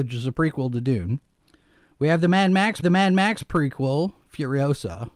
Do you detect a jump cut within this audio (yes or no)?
yes